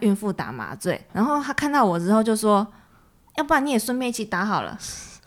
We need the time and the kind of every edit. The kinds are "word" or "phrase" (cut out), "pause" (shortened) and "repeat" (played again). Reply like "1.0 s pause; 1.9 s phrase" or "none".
1.1 s word